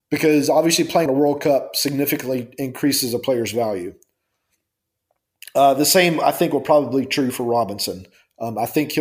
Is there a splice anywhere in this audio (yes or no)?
yes